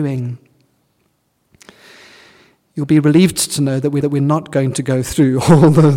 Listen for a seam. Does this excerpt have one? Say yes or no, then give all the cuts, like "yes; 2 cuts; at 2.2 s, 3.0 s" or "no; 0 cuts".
yes; 1 cut; at 4.0 s